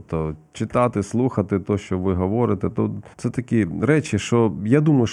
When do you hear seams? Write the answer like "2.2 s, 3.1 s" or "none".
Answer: 3.1 s